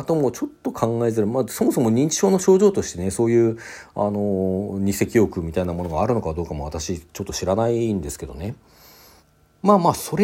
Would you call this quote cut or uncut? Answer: cut